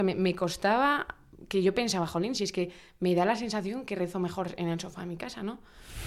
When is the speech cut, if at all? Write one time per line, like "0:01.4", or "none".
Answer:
none